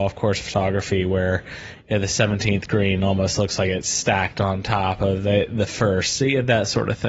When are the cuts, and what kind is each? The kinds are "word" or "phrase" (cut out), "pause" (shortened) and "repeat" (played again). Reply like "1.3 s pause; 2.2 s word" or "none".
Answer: none